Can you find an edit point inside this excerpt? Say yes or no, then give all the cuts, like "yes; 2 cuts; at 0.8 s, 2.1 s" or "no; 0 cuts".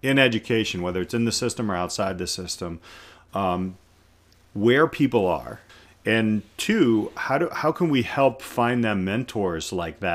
no; 0 cuts